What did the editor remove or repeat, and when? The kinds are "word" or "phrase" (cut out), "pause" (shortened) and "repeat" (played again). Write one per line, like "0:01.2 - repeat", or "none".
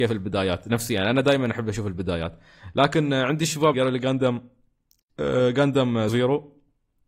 0:03.7 - word
0:06.1 - word